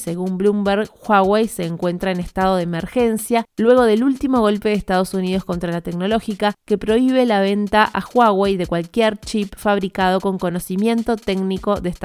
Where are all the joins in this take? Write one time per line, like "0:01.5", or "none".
none